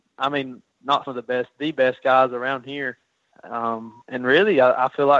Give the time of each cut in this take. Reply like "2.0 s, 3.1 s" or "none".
1.1 s, 4.0 s